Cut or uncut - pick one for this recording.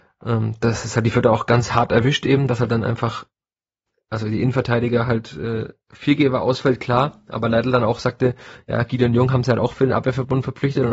uncut